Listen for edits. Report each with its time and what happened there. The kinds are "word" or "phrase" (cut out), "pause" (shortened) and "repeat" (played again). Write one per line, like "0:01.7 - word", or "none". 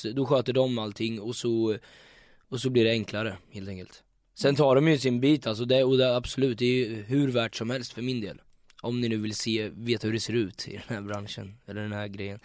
none